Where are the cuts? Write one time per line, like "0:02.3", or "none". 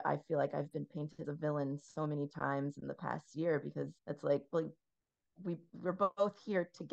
0:01.2
0:04.0